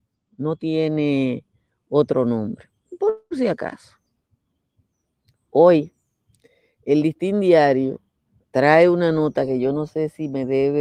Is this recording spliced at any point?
no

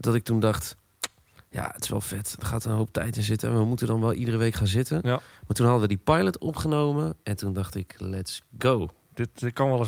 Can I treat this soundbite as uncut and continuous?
yes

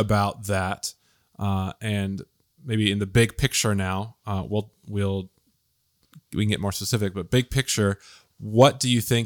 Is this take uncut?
yes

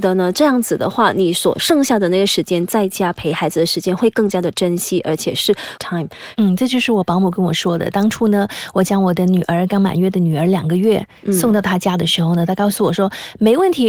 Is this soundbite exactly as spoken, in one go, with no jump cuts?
no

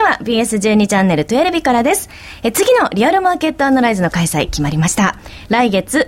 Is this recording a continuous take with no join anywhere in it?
yes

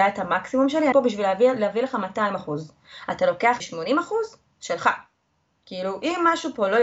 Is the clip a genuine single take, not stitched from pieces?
no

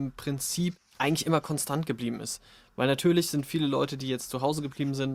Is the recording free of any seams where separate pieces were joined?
yes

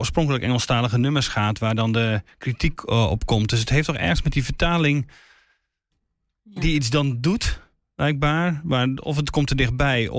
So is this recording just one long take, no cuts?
yes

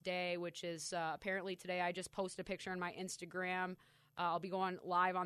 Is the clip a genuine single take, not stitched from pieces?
yes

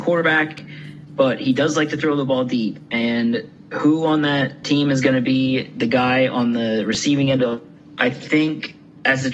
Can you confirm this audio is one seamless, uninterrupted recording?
yes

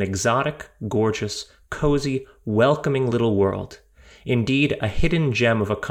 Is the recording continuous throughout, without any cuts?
yes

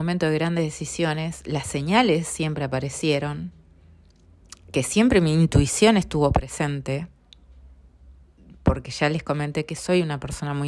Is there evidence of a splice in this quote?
no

